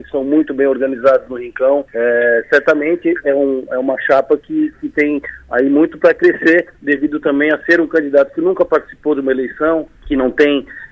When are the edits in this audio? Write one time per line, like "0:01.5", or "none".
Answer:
0:01.9
0:06.7
0:09.9